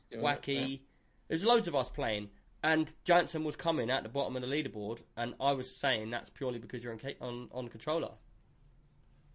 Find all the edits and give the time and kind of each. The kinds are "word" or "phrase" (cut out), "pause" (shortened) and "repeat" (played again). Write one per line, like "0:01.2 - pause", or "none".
none

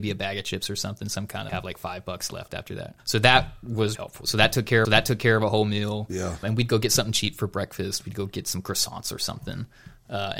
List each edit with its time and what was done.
0:01.5 - phrase
0:03.0 - pause
0:03.9 - word
0:04.8 - repeat
0:06.4 - word

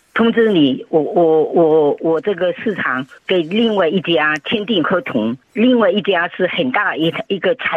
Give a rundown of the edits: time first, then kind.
0:03.2 - pause
0:05.4 - pause

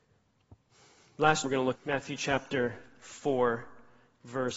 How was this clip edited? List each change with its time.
0:01.4 - word
0:01.7 - word

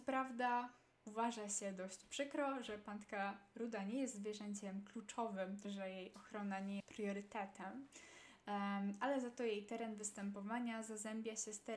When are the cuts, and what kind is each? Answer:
0:05.6 - word
0:06.8 - phrase

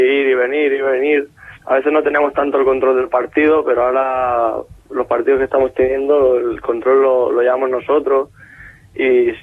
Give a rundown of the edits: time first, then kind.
0:01.6 - pause

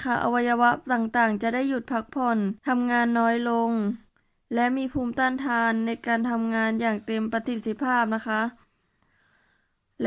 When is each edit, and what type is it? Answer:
0:02.6 - pause

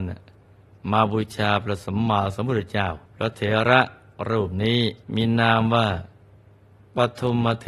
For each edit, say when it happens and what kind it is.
0:03.0 - pause
0:05.0 - pause

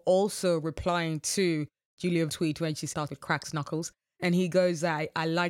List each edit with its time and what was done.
0:02.3 - word
0:03.1 - word

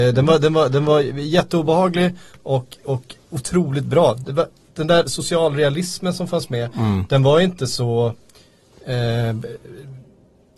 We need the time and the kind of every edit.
none

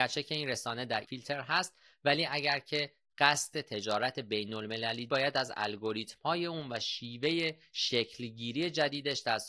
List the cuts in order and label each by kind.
0:01.0 - word
0:05.1 - word

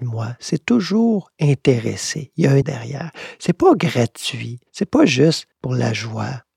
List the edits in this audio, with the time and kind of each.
0:02.6 - word
0:04.7 - pause
0:05.5 - pause

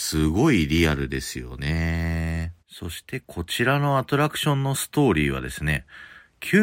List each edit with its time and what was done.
0:02.6 - pause

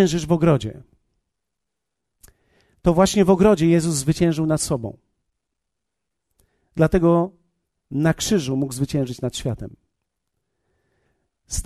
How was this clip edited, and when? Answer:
none

